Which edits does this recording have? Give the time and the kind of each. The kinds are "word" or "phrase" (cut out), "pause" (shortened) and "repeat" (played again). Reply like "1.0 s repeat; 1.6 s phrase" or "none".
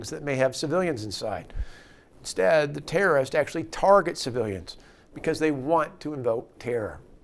none